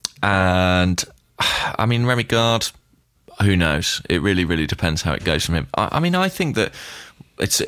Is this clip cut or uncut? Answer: uncut